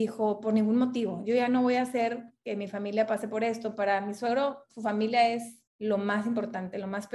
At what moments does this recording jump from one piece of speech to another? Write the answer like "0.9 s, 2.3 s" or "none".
5.7 s